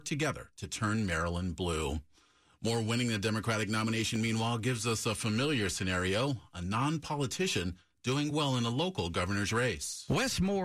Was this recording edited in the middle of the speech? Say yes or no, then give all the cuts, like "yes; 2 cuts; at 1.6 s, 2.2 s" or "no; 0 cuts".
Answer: no; 0 cuts